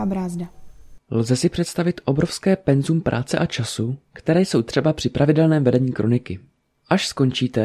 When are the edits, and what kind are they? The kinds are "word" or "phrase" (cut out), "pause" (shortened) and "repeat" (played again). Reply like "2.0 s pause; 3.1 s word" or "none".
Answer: none